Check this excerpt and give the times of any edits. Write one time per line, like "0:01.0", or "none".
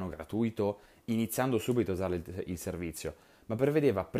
none